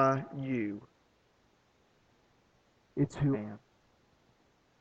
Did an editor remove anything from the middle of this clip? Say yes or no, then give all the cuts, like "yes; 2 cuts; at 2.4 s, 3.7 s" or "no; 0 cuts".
yes; 1 cut; at 3.3 s